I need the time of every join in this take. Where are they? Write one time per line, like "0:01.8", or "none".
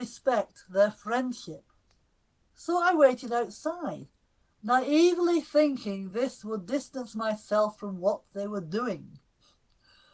none